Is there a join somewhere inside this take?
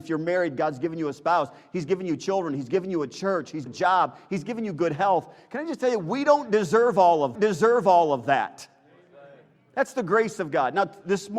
yes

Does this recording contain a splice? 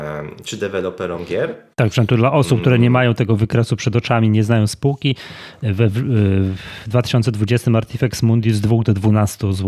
no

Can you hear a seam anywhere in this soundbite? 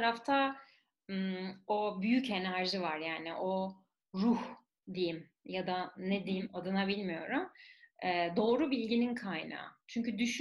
no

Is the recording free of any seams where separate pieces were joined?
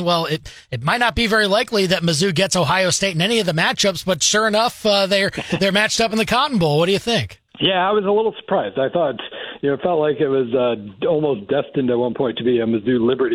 no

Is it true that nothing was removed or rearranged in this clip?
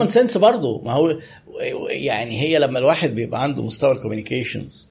yes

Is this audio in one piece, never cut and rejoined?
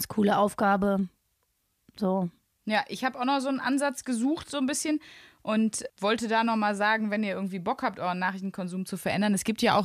yes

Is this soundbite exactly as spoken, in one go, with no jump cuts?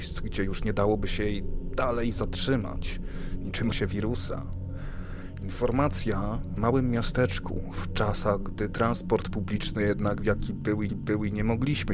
no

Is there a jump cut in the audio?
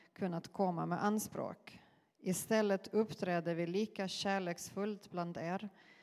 no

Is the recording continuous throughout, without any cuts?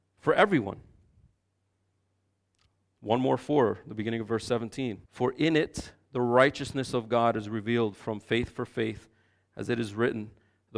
no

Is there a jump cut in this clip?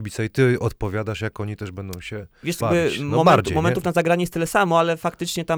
yes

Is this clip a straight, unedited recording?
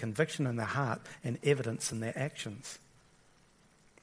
yes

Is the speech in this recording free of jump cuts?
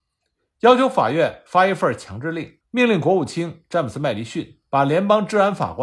no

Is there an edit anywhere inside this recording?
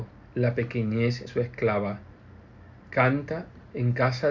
yes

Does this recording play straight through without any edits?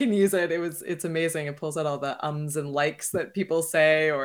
yes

